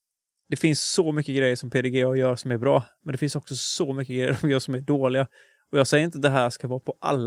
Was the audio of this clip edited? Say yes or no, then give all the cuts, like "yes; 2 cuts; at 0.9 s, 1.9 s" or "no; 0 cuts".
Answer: no; 0 cuts